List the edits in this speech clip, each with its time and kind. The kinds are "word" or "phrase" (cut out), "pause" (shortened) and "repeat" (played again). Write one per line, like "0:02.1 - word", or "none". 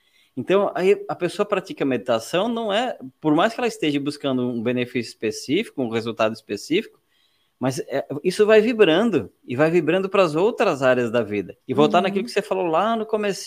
0:11.6 - pause